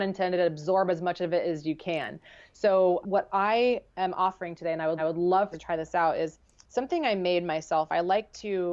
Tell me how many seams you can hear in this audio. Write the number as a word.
three